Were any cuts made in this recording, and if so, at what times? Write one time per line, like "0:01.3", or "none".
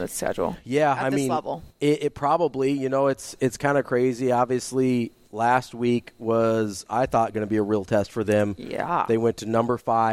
none